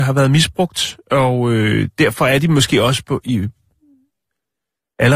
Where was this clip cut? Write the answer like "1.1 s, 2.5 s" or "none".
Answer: none

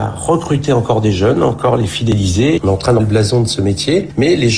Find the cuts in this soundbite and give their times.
3.0 s

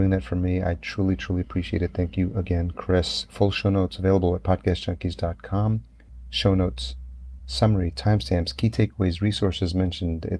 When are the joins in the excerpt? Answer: none

